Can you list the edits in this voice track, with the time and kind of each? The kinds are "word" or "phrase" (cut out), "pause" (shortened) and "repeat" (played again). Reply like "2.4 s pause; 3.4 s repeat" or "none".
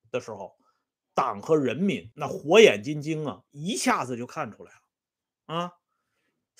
2.1 s pause

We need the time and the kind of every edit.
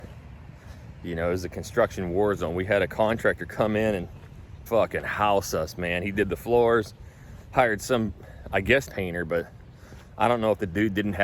4.7 s word; 8.9 s phrase

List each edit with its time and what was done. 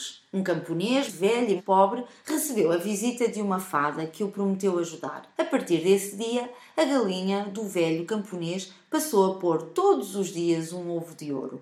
1.1 s word; 1.6 s word; 5.3 s pause

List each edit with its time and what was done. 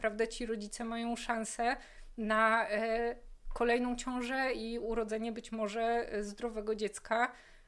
none

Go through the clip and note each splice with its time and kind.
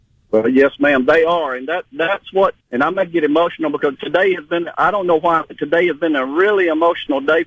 2.6 s pause

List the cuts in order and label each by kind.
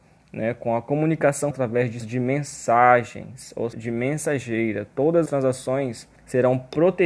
1.5 s word; 2.0 s word; 3.7 s word; 5.3 s word; 6.2 s pause

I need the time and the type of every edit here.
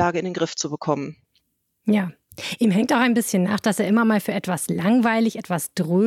none

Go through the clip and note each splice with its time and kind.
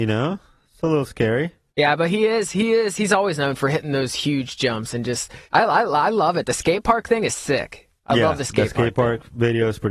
1.7 s pause; 5.5 s pause; 8.0 s pause

